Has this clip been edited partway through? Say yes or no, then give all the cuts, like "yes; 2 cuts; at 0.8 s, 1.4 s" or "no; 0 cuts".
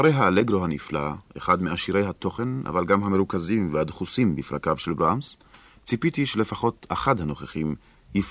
no; 0 cuts